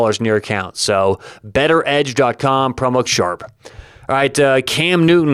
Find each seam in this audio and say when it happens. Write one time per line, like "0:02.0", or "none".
0:03.1